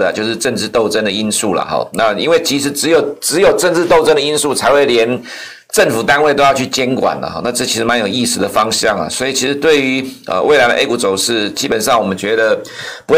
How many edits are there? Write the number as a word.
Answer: zero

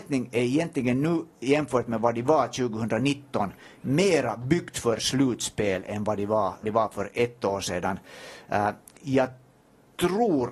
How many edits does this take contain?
one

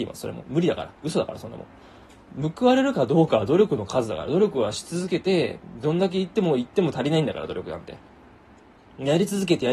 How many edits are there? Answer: zero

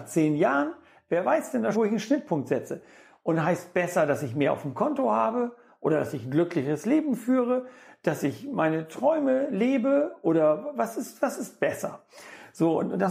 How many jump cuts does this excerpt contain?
one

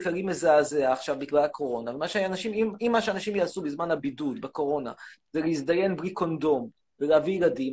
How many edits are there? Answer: zero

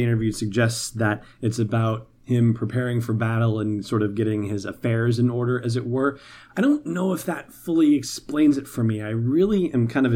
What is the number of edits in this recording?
zero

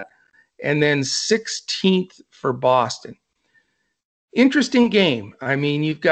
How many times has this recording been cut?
zero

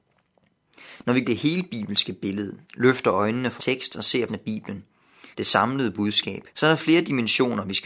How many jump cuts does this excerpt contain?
six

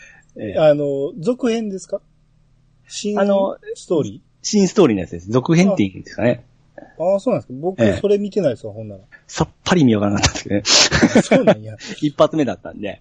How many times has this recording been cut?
two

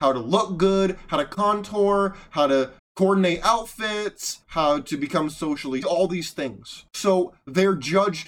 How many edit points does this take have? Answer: four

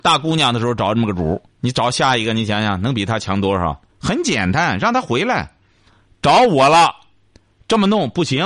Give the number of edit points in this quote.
two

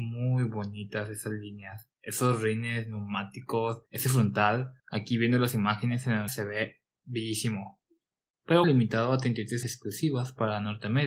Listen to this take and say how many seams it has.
six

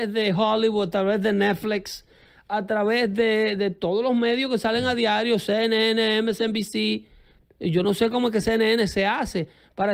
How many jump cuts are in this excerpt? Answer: zero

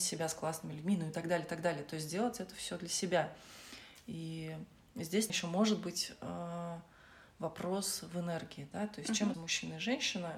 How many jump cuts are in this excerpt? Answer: two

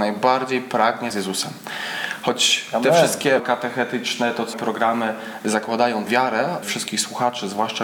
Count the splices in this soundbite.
five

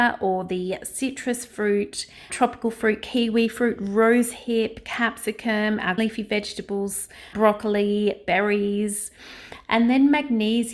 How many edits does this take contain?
three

